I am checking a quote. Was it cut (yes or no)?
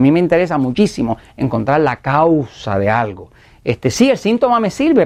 no